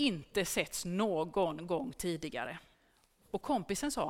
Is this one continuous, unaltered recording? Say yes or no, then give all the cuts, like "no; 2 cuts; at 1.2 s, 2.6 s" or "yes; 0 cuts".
no; 1 cut; at 2.7 s